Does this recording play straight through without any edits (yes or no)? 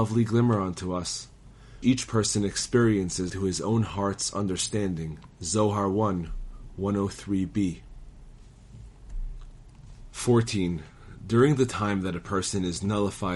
no